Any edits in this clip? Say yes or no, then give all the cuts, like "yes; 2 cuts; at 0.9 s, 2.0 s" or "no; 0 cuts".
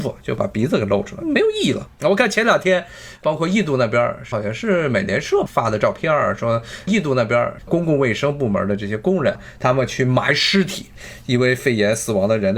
yes; 2 cuts; at 1.2 s, 1.9 s